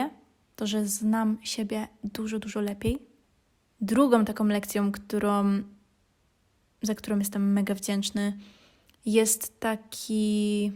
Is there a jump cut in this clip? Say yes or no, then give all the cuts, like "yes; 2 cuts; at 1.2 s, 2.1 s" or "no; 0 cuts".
no; 0 cuts